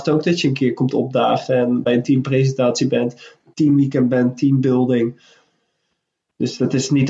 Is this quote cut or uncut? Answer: uncut